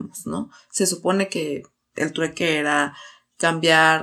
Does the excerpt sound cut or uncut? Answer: uncut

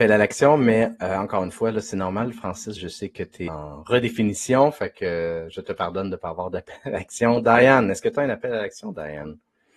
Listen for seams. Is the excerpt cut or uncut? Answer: cut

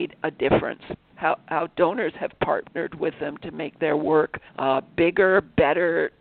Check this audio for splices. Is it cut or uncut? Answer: cut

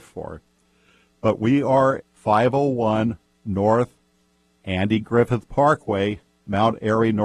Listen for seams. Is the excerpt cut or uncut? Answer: cut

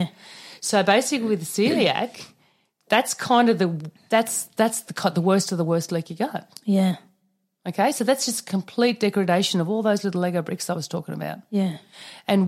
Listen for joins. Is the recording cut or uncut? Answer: uncut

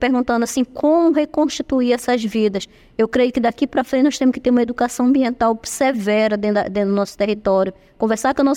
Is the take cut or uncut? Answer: uncut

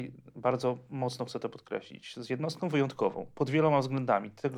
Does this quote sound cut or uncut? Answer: uncut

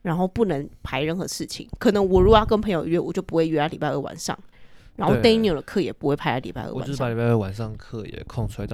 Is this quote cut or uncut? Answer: uncut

